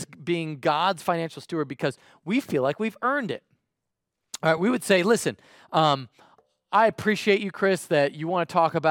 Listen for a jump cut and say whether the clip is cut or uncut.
uncut